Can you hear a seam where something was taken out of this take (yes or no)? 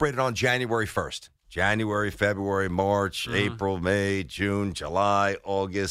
yes